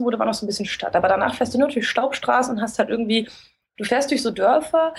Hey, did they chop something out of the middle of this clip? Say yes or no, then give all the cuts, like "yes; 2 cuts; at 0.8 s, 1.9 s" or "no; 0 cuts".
no; 0 cuts